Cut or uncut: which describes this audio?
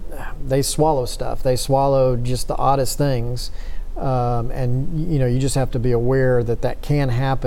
uncut